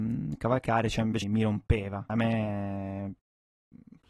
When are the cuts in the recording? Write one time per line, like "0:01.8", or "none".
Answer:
0:01.2
0:02.1